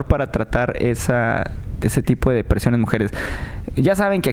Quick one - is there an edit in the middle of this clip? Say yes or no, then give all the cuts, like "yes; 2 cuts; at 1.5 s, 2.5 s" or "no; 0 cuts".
no; 0 cuts